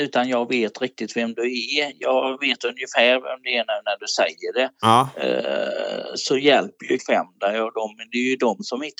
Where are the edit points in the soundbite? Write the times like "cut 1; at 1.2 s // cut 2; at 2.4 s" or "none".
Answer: cut 1; at 7.0 s